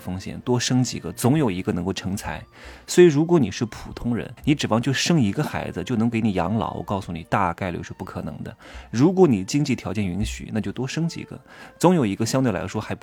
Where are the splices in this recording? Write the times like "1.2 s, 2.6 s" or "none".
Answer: 4.4 s